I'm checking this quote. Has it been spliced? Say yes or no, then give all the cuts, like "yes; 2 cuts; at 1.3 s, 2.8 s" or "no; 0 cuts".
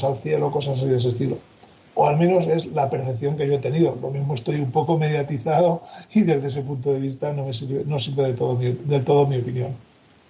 no; 0 cuts